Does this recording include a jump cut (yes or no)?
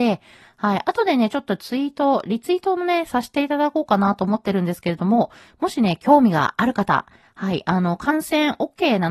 no